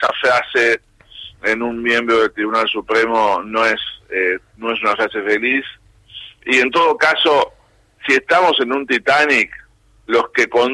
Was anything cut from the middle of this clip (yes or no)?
no